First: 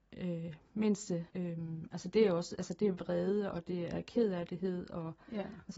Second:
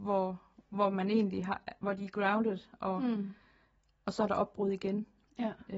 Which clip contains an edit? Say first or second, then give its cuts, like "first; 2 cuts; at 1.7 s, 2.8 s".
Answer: first; 1 cut; at 1.3 s